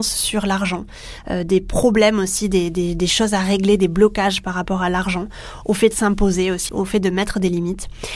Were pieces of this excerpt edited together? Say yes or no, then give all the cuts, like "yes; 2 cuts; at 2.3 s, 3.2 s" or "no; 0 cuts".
yes; 1 cut; at 6.7 s